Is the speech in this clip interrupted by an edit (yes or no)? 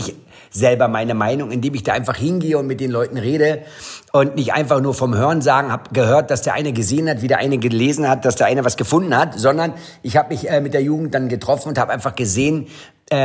no